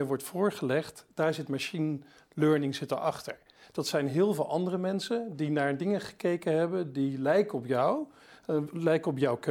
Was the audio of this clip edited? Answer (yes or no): no